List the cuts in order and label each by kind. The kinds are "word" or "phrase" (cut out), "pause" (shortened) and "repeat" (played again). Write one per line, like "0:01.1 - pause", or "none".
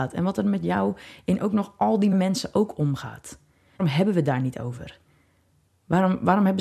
0:02.1 - word
0:03.8 - word